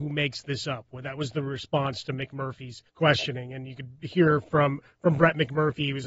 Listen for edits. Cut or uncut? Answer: cut